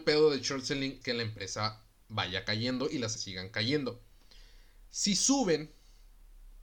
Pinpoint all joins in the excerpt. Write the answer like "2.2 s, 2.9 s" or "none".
1.0 s, 3.2 s